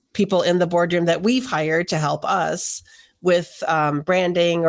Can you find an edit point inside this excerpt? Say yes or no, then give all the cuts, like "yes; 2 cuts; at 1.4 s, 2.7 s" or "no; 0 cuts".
no; 0 cuts